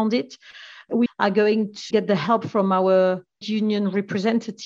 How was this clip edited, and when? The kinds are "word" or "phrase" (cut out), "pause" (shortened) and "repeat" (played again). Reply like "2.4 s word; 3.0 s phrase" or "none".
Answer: 1.1 s word; 1.9 s word; 3.4 s word